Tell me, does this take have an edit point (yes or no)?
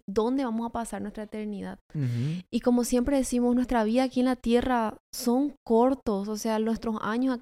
no